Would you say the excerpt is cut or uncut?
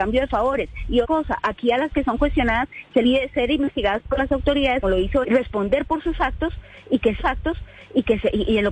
cut